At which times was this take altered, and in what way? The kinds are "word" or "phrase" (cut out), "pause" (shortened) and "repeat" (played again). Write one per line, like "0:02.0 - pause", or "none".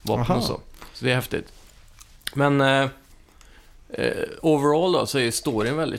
0:04.4 - word